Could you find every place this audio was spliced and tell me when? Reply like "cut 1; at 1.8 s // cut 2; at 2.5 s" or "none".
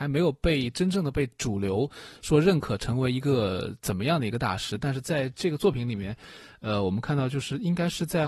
none